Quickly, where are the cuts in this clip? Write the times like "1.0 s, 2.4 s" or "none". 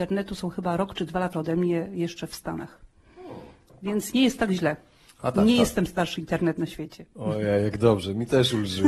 1.3 s, 6.2 s